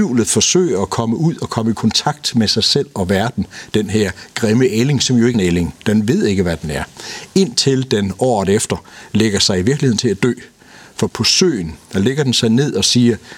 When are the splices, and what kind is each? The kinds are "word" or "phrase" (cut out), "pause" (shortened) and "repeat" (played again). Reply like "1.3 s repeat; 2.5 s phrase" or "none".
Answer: 5.3 s word; 11.1 s word

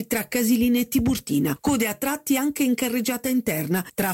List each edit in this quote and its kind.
none

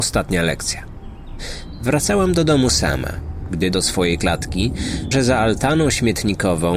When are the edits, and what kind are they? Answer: 3.7 s word; 5.1 s word

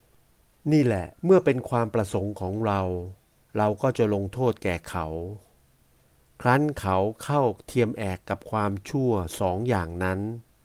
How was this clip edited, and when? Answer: 1.1 s pause

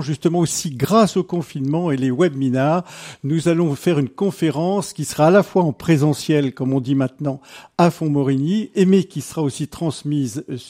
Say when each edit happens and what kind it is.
none

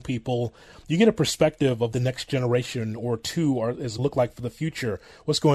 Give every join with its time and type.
1.9 s word; 4.0 s word

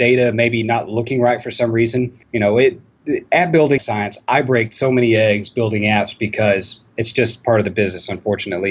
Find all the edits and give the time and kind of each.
2.2 s pause; 3.8 s phrase; 6.9 s pause

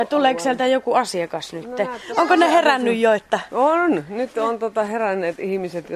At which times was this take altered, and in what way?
none

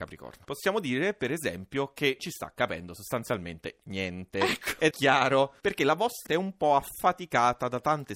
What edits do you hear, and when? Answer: 2.2 s word; 4.9 s word; 6.3 s word

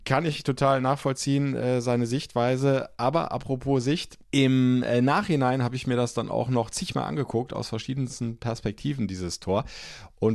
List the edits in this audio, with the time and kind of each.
4.2 s pause

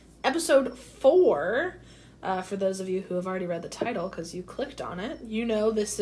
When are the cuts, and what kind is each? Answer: none

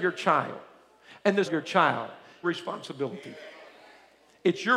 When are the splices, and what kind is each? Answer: 1.4 s phrase; 2.4 s phrase

